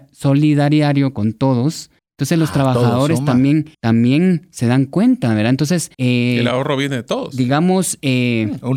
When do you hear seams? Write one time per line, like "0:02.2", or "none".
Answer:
0:02.0
0:03.7
0:05.9